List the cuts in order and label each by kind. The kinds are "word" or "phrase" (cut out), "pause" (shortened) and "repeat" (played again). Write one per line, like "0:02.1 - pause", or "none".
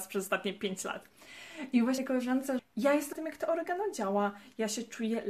0:02.0 - word
0:02.6 - word
0:03.1 - word